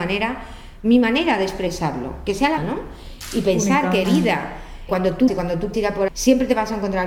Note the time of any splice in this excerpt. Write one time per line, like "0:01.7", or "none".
0:02.6
0:04.0
0:04.9
0:05.3
0:05.7
0:06.1